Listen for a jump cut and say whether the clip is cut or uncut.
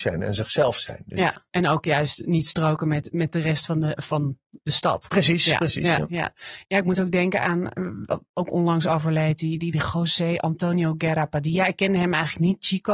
uncut